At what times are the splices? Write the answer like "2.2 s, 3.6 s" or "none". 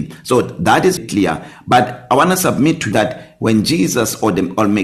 1.0 s, 2.9 s

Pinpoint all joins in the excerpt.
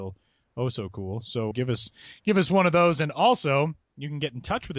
1.5 s, 3.8 s

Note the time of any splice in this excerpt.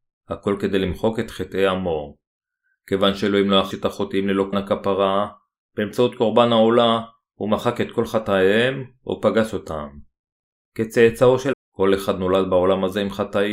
3.7 s, 4.5 s, 11.5 s

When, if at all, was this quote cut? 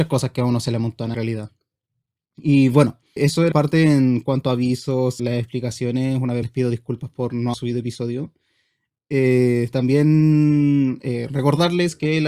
1.1 s, 3.2 s, 3.5 s, 5.2 s, 6.4 s, 7.5 s

